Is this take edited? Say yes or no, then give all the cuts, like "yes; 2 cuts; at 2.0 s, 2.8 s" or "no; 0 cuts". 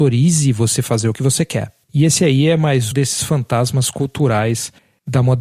yes; 2 cuts; at 1.8 s, 2.9 s